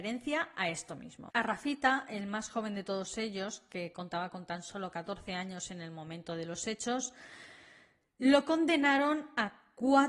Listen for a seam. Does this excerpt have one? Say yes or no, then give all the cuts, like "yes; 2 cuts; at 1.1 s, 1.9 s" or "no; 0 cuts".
no; 0 cuts